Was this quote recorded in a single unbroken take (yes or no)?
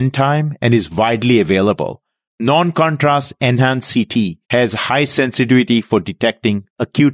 no